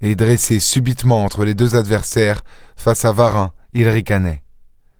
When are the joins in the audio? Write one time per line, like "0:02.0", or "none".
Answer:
none